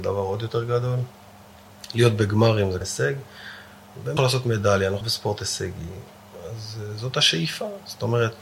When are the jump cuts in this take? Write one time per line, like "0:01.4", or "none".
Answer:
0:02.8
0:04.2
0:05.0